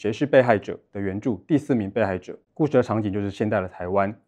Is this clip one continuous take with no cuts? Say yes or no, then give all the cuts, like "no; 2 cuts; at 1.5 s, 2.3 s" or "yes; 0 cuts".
no; 1 cut; at 2.4 s